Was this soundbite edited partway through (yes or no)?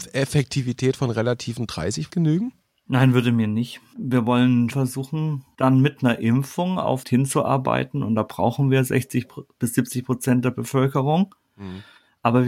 yes